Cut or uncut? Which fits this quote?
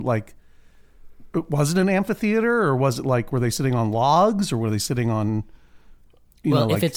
uncut